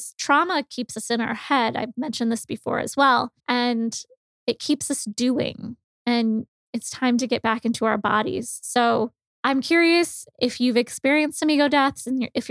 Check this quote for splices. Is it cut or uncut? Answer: cut